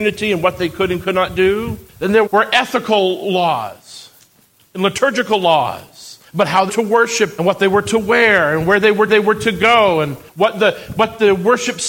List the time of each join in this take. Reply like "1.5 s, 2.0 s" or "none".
1.9 s, 2.3 s, 4.6 s, 6.3 s, 6.7 s, 7.4 s, 9.1 s, 10.3 s